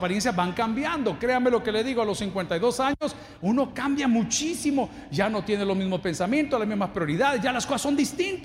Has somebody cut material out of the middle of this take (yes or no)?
no